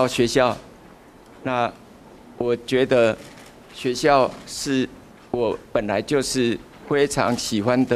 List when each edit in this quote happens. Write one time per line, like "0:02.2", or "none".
0:05.1